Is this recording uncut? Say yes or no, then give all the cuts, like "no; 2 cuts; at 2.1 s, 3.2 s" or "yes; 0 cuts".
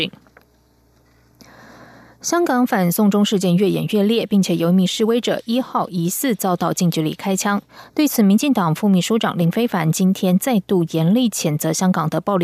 yes; 0 cuts